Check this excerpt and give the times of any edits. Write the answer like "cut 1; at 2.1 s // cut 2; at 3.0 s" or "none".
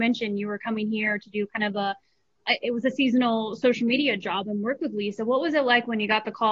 none